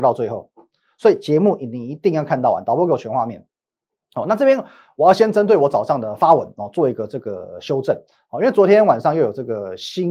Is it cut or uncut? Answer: uncut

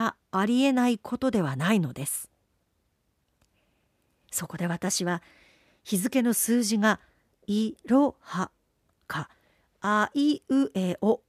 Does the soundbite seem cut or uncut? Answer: uncut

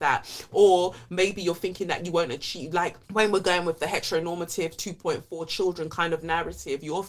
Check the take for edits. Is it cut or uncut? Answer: cut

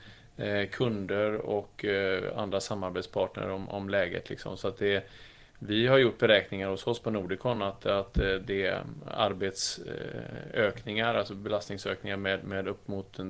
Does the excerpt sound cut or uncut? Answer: uncut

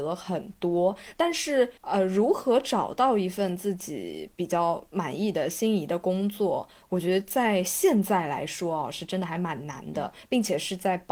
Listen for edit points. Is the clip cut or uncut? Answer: cut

